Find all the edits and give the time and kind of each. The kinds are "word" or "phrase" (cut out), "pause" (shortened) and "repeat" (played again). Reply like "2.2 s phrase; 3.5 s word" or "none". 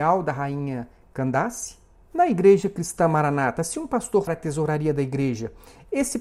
2.0 s pause; 4.3 s phrase